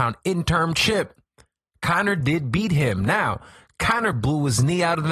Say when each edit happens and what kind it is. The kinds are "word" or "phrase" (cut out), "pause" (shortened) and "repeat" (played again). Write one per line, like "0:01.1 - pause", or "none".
none